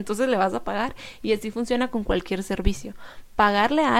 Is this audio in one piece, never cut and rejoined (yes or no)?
yes